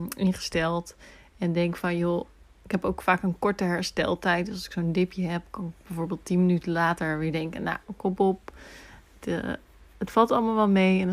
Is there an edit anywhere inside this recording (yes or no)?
no